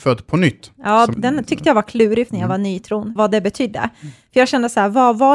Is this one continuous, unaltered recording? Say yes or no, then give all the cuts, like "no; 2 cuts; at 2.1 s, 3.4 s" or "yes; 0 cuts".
no; 3 cuts; at 1.1 s, 2.3 s, 3.2 s